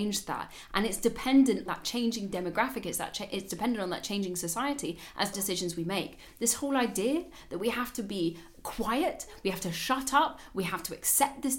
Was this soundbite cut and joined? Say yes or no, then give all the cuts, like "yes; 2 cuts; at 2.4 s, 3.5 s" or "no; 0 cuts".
yes; 2 cuts; at 1.7 s, 5.3 s